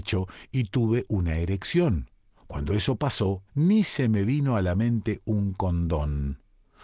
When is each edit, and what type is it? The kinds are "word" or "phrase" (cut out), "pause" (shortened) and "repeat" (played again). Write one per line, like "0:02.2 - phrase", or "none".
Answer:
0:02.3 - pause
0:03.5 - pause

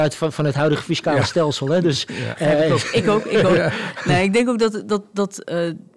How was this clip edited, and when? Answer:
none

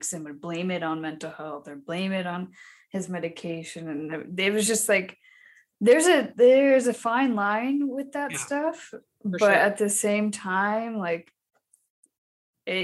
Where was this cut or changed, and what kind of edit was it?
none

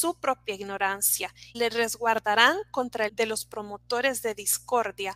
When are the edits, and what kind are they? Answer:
0:01.5 - word
0:03.1 - phrase

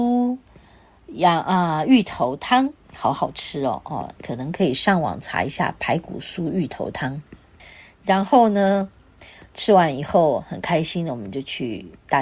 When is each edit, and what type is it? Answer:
0:02.7 - word
0:04.2 - word

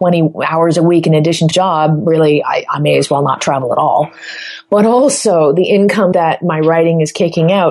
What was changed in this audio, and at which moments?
0:01.5 - phrase
0:06.1 - word

